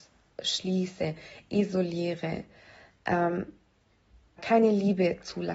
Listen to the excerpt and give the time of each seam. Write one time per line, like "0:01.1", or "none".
0:04.4